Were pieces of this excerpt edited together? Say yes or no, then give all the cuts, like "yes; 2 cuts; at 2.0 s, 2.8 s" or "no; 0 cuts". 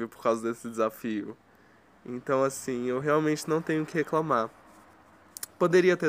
no; 0 cuts